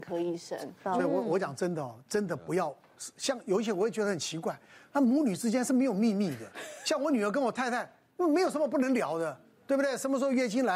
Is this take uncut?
yes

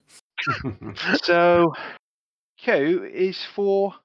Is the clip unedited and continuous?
yes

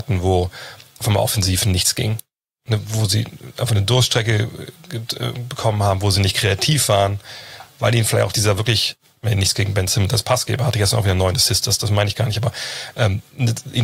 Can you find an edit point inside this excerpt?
no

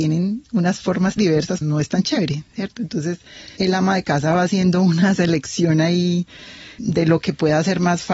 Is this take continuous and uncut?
no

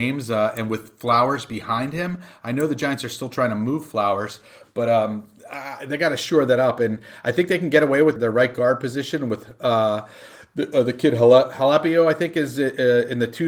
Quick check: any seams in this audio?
yes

